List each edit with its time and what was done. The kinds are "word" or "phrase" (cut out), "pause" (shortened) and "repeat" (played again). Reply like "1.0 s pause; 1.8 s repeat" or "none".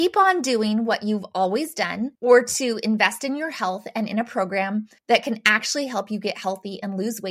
2.1 s pause; 5.0 s pause